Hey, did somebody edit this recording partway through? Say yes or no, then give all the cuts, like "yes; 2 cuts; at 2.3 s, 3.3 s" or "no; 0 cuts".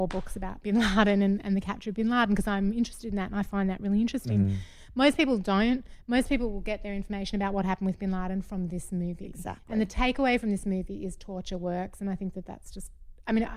no; 0 cuts